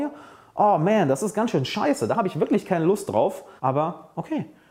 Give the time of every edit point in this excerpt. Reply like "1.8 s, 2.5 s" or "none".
3.6 s